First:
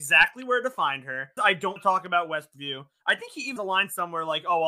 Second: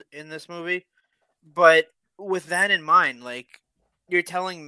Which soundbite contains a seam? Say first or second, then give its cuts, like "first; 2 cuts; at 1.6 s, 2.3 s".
first; 3 cuts; at 1.4 s, 1.8 s, 3.6 s